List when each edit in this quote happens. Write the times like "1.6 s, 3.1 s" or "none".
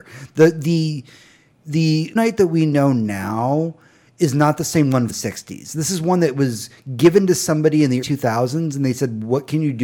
2.2 s, 5.1 s, 8.0 s